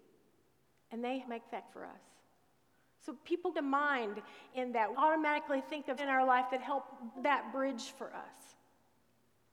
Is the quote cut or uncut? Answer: cut